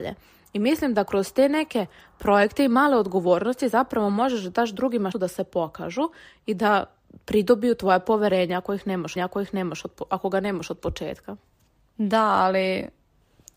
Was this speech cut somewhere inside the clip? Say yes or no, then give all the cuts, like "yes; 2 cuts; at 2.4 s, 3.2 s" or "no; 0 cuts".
yes; 3 cuts; at 5.1 s, 9.2 s, 11.6 s